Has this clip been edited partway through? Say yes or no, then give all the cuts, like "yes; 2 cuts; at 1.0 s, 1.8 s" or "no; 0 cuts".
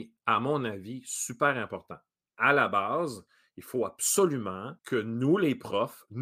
yes; 1 cut; at 4.8 s